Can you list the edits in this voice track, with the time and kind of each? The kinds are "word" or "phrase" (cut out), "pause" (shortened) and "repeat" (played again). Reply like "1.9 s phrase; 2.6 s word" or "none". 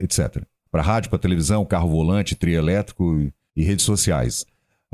3.5 s pause